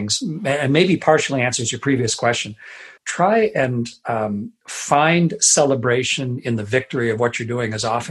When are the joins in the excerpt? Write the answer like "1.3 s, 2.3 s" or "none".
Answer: 3.0 s